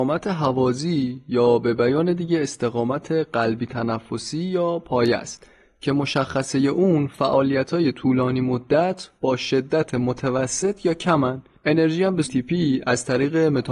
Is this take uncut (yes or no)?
no